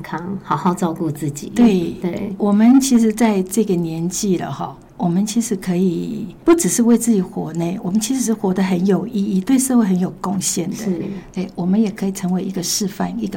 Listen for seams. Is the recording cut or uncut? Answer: cut